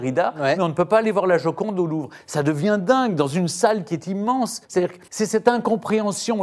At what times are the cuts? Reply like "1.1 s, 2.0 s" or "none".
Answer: 4.6 s, 5.1 s

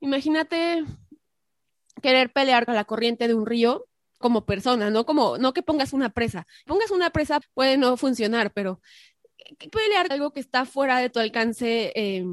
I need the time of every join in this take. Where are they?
2.7 s, 4.2 s, 6.7 s, 7.4 s, 9.7 s, 10.1 s

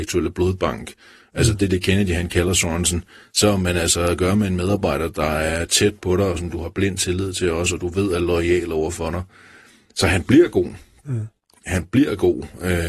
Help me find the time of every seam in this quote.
none

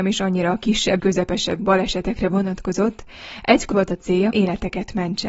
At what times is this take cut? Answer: 1.0 s, 1.6 s, 3.7 s, 4.3 s

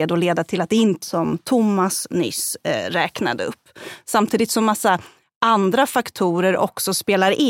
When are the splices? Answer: 1.0 s

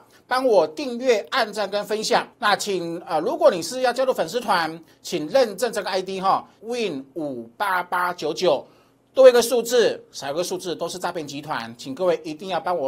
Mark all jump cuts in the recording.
2.3 s, 6.6 s

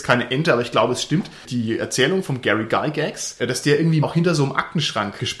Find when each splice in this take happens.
4.0 s

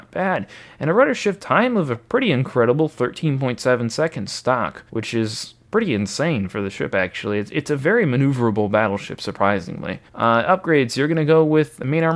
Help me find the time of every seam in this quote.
4.9 s, 10.1 s

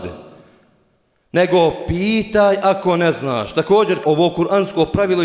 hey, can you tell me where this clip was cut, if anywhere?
4.0 s

